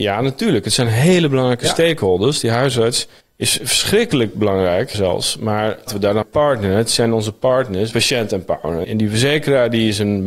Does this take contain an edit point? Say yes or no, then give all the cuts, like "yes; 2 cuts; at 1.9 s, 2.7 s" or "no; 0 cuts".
yes; 6 cuts; at 3.2 s, 4.9 s, 5.9 s, 6.2 s, 7.9 s, 8.8 s